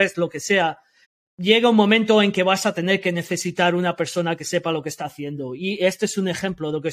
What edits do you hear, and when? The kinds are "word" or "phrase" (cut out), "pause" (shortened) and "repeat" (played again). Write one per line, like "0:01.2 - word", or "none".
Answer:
0:01.0 - pause